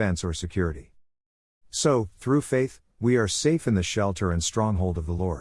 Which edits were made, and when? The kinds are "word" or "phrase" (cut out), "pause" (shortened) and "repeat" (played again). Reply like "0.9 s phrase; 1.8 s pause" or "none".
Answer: none